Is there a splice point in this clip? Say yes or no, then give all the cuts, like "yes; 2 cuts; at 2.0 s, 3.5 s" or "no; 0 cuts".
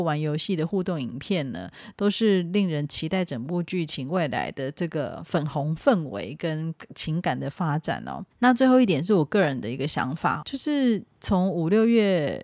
yes; 2 cuts; at 8.3 s, 10.4 s